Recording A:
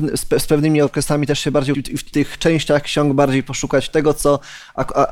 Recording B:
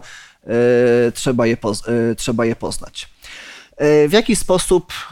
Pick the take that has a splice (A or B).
A